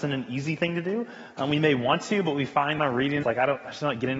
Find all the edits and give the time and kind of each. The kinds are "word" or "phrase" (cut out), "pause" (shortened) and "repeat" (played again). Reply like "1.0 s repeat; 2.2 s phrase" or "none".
2.8 s phrase; 3.2 s phrase